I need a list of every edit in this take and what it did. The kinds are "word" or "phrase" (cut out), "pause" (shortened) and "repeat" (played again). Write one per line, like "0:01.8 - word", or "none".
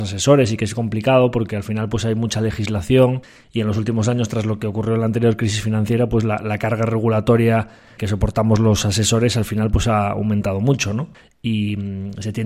none